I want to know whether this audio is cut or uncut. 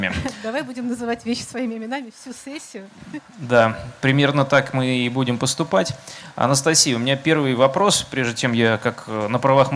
uncut